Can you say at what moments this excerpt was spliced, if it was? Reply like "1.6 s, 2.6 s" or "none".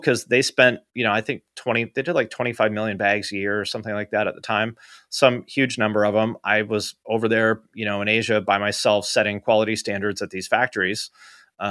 none

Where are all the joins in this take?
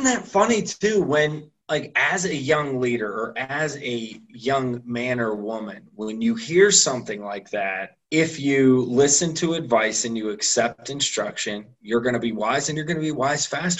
1.6 s, 8.0 s

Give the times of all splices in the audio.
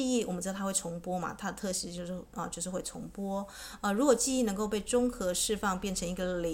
none

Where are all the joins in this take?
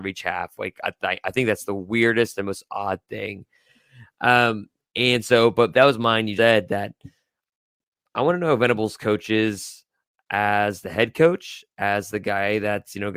6.4 s

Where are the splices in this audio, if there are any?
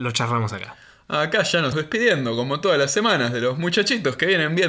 1.7 s

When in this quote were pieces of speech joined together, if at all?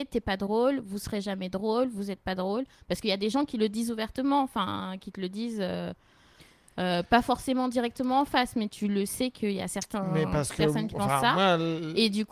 none

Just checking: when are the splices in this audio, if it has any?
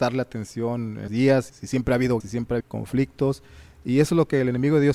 1.1 s, 1.5 s, 2.2 s, 2.6 s

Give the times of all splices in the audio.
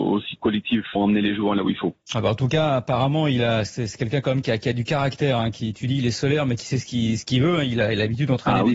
1.0 s, 2.0 s

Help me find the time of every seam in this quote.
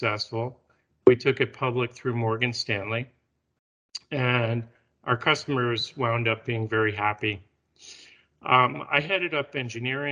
none

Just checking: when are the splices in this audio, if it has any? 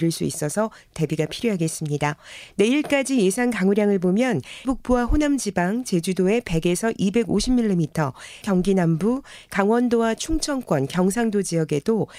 4.6 s, 8.4 s

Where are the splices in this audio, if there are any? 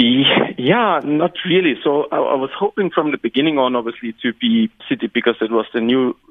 4.8 s

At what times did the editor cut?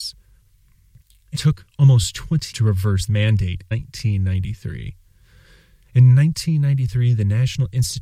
1.3 s, 2.5 s, 3.1 s, 3.7 s

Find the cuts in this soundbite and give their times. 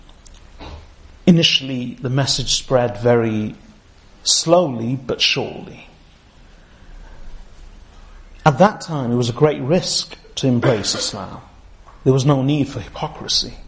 none

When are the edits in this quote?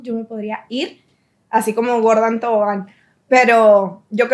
none

